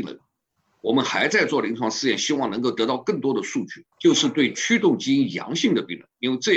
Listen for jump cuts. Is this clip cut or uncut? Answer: cut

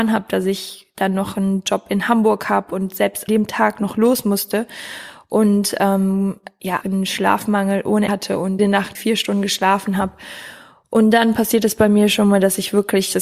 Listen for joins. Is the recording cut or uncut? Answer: cut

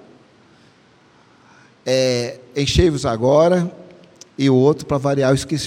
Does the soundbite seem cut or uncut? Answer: cut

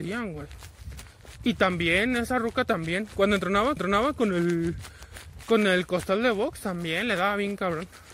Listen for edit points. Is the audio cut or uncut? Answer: cut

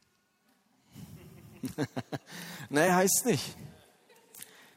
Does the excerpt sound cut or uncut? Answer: uncut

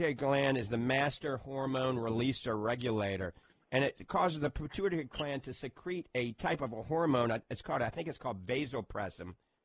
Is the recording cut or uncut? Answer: uncut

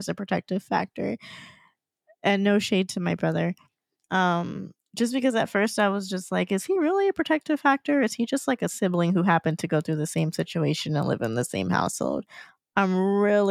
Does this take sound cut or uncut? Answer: uncut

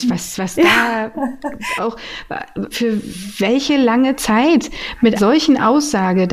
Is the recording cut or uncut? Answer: cut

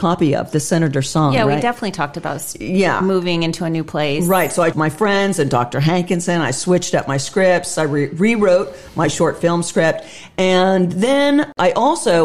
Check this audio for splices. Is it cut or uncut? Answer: cut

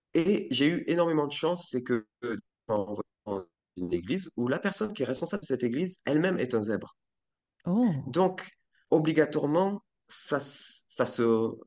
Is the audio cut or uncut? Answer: uncut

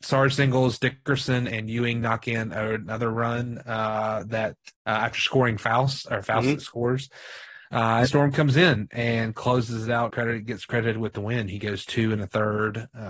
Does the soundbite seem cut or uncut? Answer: cut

